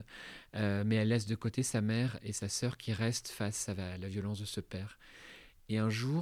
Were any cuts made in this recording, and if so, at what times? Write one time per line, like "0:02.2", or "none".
none